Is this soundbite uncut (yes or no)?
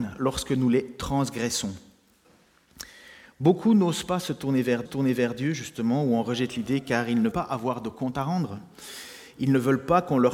no